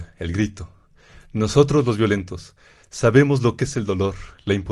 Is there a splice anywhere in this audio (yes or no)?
no